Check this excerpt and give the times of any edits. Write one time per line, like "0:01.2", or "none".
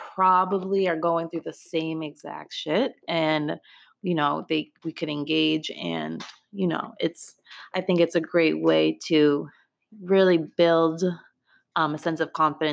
none